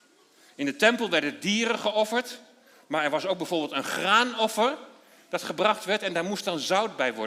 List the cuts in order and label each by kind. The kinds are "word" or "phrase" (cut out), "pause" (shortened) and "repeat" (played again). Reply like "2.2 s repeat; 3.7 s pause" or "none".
none